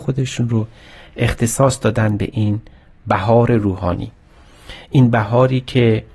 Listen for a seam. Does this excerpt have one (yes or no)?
no